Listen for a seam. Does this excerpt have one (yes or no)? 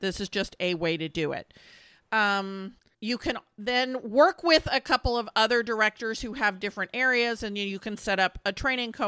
no